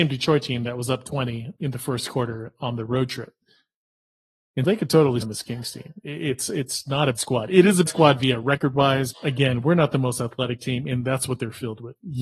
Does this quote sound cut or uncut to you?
cut